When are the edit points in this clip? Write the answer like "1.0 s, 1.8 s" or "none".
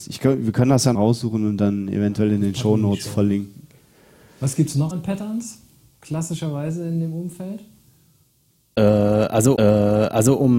0.9 s, 4.9 s, 9.6 s